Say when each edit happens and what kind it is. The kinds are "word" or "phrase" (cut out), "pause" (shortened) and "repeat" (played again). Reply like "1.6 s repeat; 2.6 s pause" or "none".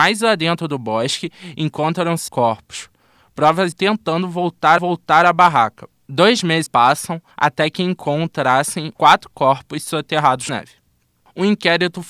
2.3 s phrase; 3.7 s phrase; 4.8 s repeat; 5.9 s pause; 6.7 s word; 7.3 s pause; 8.9 s phrase; 10.5 s word